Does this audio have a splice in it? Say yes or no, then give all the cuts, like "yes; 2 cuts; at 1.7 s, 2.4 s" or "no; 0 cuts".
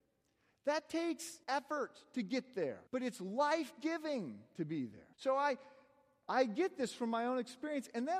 yes; 3 cuts; at 1.4 s, 2.9 s, 5.1 s